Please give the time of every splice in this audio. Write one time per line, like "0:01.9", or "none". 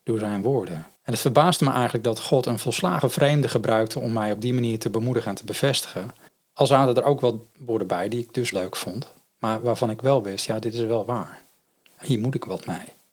0:00.9
0:06.3
0:08.5
0:12.0